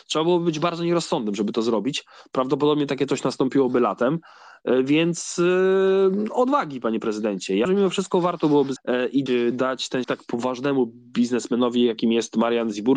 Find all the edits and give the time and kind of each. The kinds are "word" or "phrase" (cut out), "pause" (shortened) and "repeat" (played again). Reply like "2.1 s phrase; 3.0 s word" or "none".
7.7 s word; 8.8 s word; 9.3 s word; 10.0 s word